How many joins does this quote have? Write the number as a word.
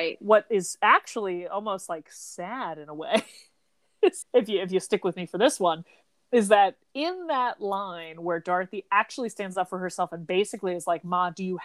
one